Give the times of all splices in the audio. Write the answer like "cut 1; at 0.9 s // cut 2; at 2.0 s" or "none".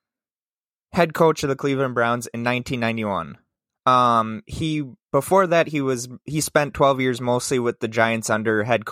none